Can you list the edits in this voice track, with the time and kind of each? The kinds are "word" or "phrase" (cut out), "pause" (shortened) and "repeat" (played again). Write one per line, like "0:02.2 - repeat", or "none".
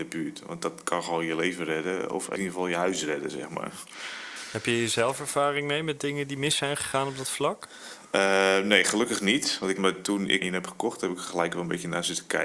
0:02.4 - word
0:09.8 - word
0:10.4 - word